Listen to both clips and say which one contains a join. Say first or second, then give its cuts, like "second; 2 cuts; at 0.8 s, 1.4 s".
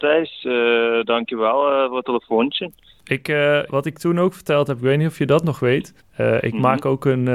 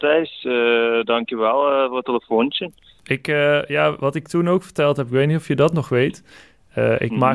first; 2 cuts; at 3.7 s, 6.0 s